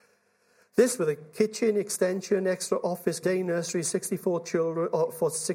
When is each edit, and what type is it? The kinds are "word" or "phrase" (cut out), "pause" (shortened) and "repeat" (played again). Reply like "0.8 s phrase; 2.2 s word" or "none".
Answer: 1.0 s phrase; 3.2 s phrase